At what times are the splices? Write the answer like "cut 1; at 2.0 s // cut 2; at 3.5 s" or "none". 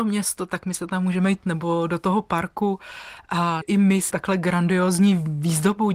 cut 1; at 1.4 s // cut 2; at 3.6 s // cut 3; at 4.1 s